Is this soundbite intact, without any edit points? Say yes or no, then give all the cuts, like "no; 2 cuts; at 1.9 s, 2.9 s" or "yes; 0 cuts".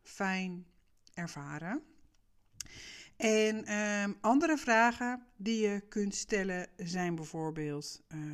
yes; 0 cuts